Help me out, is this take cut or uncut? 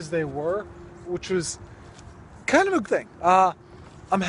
cut